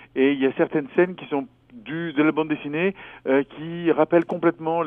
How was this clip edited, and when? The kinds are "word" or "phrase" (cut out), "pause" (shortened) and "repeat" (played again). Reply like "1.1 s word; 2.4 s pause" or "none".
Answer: none